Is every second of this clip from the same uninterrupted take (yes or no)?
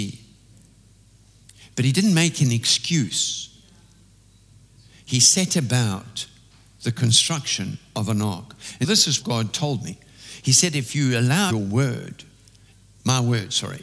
no